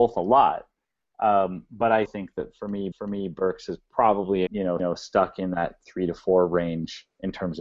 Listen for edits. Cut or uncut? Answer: cut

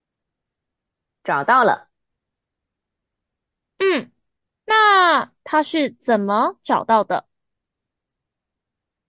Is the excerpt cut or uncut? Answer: uncut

